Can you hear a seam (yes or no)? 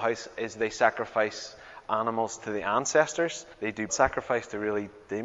yes